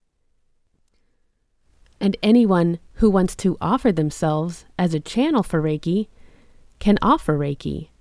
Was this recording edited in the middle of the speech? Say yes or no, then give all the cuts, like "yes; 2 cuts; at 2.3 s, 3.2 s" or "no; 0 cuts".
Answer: no; 0 cuts